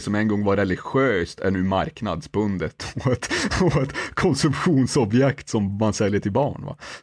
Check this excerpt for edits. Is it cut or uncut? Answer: uncut